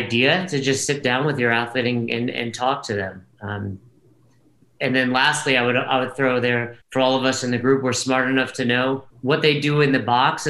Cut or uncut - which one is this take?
cut